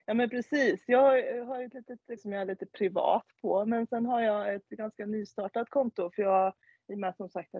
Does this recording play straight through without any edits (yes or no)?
no